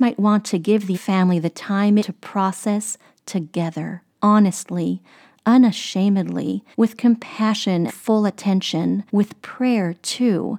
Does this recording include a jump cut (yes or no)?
yes